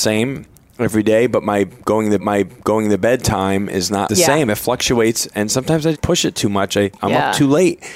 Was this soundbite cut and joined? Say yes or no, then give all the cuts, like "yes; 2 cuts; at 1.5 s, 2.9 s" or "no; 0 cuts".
yes; 3 cuts; at 2.2 s, 4.1 s, 5.9 s